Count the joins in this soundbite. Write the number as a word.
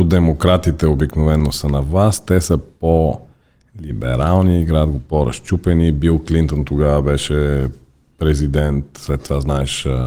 zero